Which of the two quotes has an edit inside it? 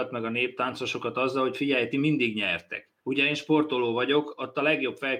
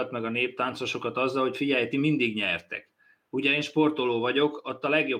first; 1 cut; at 3.0 s

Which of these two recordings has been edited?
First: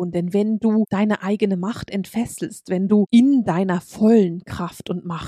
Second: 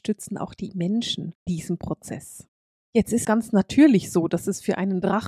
second; 2 cuts; at 1.5 s, 3.2 s

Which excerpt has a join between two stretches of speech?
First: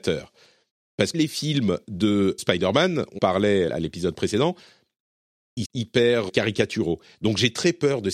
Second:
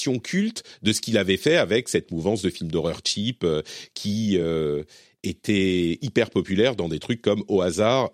first; 6 cuts; at 1.1 s, 2.4 s, 3.2 s, 3.7 s, 5.6 s, 6.3 s

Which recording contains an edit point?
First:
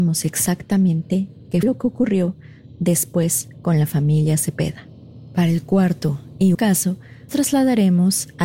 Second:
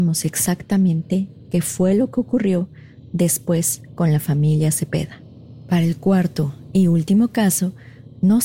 first; 3 cuts; at 1.6 s, 6.5 s, 7.3 s

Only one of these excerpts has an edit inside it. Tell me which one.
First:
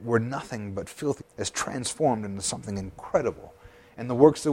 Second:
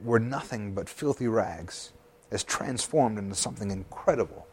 first; 1 cut; at 1.2 s

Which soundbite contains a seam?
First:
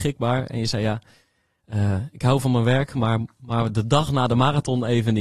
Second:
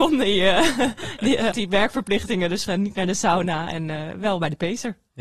second; 2 cuts; at 1.5 s, 2.7 s

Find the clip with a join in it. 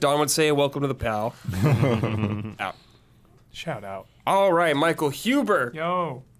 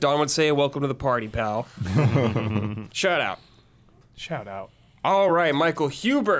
first; 3 cuts; at 1.0 s, 2.6 s, 4.2 s

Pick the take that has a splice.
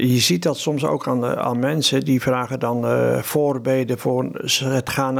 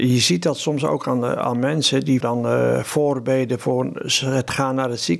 second; 1 cut; at 2.2 s

